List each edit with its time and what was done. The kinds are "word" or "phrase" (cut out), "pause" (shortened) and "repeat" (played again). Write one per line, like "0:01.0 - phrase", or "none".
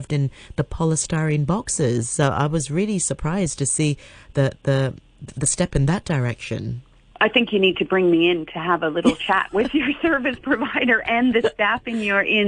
none